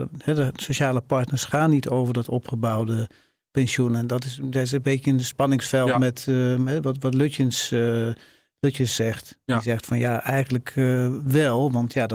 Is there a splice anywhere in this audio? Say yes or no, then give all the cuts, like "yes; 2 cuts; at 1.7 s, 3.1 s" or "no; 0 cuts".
no; 0 cuts